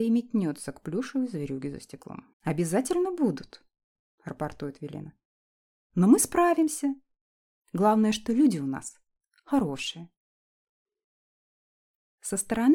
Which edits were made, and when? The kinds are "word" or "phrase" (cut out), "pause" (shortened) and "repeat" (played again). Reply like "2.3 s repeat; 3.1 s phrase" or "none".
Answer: 2.3 s pause